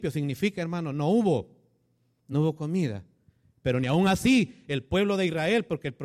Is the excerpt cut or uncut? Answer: uncut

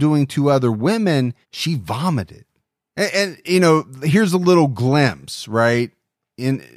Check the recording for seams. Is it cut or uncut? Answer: cut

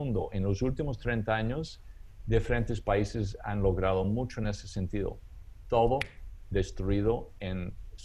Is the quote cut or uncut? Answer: uncut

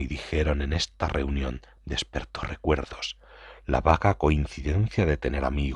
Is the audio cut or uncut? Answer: uncut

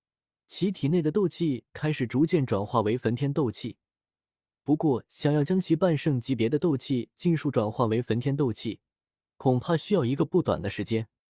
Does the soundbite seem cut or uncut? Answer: uncut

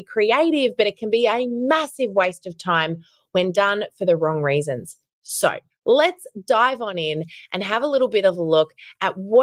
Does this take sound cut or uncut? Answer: cut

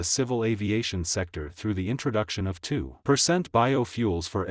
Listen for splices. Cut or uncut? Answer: uncut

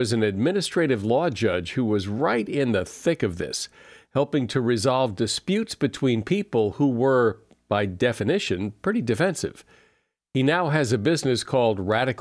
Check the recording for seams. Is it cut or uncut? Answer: uncut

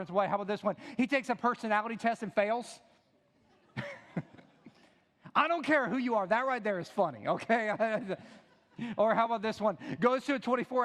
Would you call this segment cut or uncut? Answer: uncut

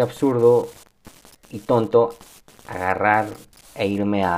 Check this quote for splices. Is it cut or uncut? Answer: uncut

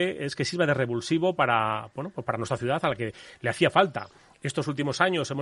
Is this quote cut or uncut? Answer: uncut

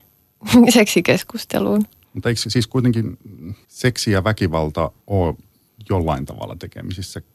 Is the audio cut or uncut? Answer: cut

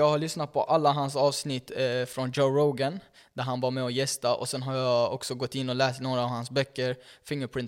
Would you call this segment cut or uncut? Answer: uncut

